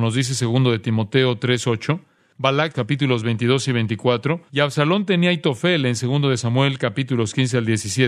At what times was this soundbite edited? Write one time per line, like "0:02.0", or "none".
0:02.7
0:04.5